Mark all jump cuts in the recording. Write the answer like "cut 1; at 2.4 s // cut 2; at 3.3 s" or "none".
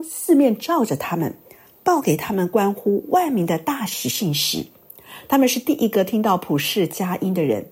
none